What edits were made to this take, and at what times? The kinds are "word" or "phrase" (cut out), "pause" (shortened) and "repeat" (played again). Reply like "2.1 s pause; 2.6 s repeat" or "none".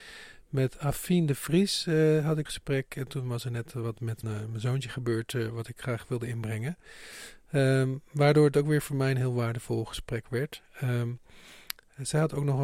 2.5 s word; 4.2 s word